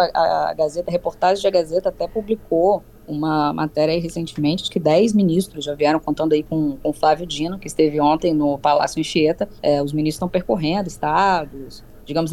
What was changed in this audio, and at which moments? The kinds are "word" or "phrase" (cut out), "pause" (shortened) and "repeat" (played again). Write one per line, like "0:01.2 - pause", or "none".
0:02.9 - pause
0:09.6 - pause